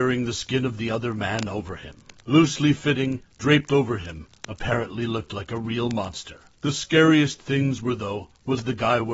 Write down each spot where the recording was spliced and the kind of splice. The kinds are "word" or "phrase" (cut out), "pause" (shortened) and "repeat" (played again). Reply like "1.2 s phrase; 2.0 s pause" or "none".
none